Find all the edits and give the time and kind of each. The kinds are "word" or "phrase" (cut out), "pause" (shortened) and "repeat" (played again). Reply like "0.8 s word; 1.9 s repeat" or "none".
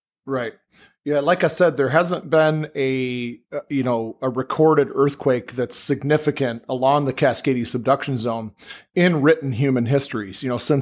none